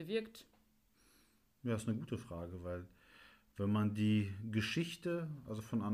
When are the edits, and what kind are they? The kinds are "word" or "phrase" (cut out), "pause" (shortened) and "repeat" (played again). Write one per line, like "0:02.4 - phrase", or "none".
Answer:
none